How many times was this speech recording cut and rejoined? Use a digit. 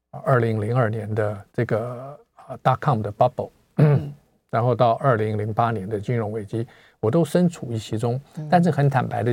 1